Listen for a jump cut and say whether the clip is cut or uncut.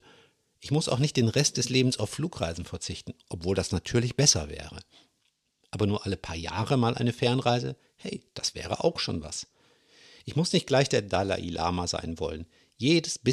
uncut